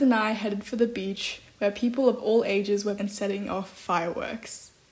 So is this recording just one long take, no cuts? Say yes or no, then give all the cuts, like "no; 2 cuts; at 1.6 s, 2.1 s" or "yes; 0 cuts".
no; 1 cut; at 3.0 s